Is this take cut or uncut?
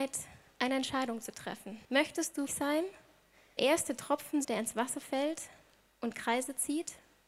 cut